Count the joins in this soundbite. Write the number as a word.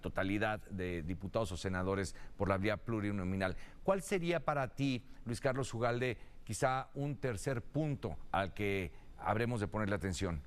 zero